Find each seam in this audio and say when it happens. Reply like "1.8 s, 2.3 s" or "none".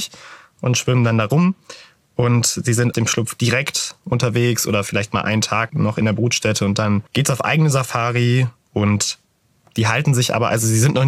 2.9 s, 5.7 s, 7.1 s